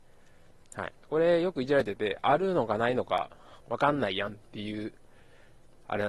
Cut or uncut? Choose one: cut